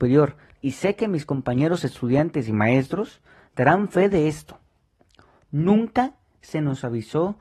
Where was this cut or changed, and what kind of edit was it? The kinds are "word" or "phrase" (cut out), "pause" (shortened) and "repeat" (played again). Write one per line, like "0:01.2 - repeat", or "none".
none